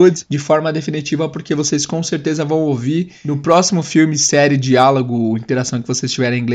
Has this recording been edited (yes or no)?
no